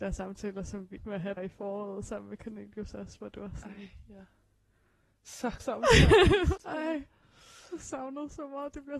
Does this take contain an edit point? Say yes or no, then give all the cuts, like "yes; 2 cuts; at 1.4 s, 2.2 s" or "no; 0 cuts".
yes; 4 cuts; at 1.0 s, 1.4 s, 5.6 s, 6.6 s